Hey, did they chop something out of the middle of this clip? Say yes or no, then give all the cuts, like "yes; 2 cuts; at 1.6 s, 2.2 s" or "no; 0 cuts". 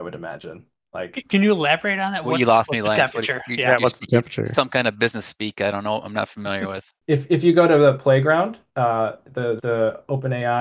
yes; 2 cuts; at 7.0 s, 9.6 s